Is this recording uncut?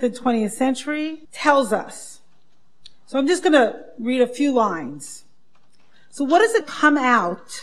no; 2 cuts; at 1.2 s, 6.6 s

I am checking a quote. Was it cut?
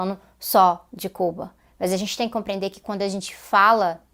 no; 0 cuts

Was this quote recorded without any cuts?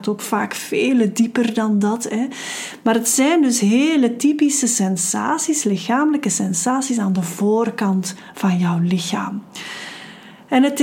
yes; 0 cuts

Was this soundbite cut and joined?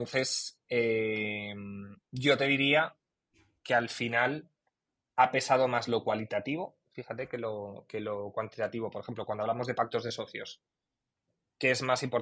no; 0 cuts

